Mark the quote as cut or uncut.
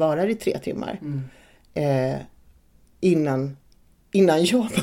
uncut